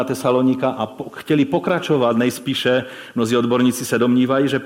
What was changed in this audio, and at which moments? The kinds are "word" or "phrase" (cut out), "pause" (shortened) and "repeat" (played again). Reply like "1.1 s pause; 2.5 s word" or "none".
none